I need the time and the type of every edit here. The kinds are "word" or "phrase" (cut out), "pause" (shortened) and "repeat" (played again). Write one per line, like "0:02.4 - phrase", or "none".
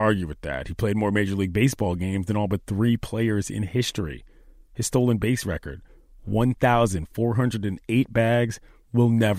none